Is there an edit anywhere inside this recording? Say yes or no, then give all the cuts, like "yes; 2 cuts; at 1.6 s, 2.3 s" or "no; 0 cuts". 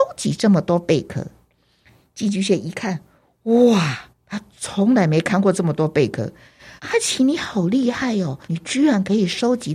yes; 3 cuts; at 4.1 s, 6.8 s, 8.4 s